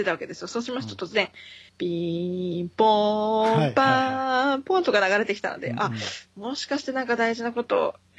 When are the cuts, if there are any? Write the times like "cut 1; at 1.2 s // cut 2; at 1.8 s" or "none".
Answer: cut 1; at 1.7 s